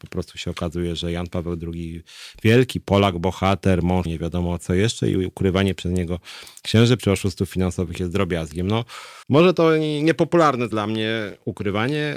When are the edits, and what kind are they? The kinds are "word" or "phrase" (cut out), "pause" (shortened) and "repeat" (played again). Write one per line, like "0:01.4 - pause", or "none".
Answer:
0:04.1 - word
0:07.0 - word
0:09.2 - pause
0:10.7 - phrase